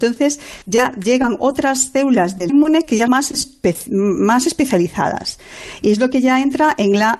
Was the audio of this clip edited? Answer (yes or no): yes